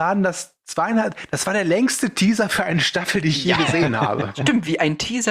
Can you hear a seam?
no; 0 cuts

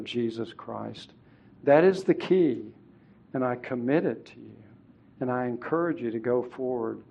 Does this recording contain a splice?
no; 0 cuts

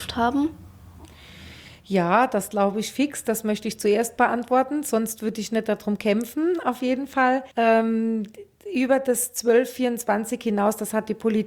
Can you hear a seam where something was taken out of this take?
yes; 1 cut; at 7.5 s

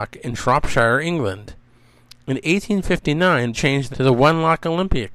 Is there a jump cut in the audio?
yes; 2 cuts; at 3.5 s, 3.9 s

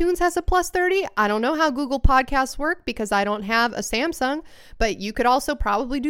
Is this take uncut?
yes; 0 cuts

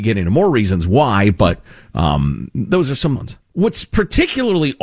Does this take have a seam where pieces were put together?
yes; 1 cut; at 3.2 s

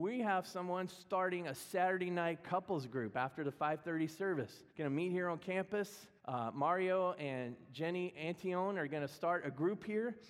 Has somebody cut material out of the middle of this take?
yes; 2 cuts; at 4.7 s, 6.2 s

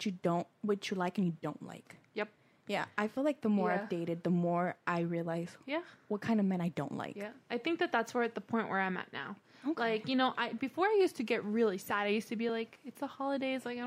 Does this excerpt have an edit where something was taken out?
no; 0 cuts

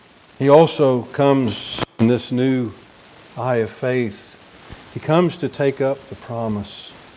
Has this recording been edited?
no; 0 cuts

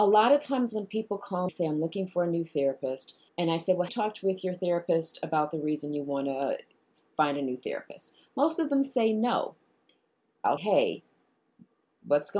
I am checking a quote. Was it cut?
yes; 4 cuts; at 1.5 s, 3.3 s, 3.9 s, 10.6 s

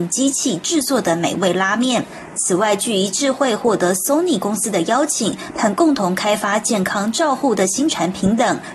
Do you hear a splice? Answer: no; 0 cuts

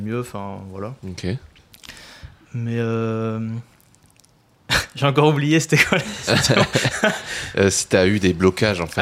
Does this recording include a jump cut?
yes; 2 cuts; at 1.0 s, 3.7 s

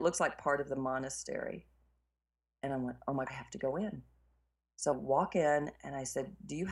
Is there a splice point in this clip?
yes; 2 cuts; at 3.3 s, 4.9 s

